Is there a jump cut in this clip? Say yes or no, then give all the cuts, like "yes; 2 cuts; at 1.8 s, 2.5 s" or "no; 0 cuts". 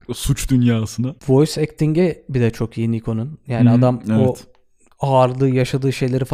yes; 1 cut; at 1.2 s